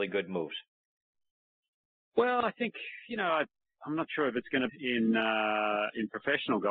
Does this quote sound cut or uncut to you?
cut